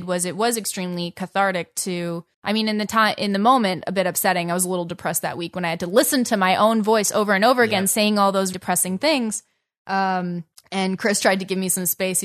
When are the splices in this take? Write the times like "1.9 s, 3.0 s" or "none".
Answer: 2.3 s, 8.5 s, 10.5 s